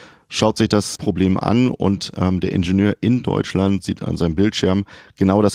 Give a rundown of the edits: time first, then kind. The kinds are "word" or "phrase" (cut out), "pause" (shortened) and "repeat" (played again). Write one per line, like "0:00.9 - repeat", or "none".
0:01.0 - word